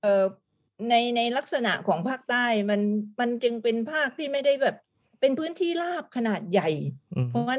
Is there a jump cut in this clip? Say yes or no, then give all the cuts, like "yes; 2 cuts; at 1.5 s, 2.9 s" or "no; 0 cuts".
no; 0 cuts